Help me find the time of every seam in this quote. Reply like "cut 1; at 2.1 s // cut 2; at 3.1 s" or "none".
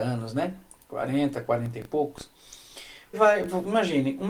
cut 1; at 3.1 s